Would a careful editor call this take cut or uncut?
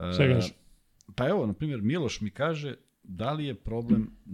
uncut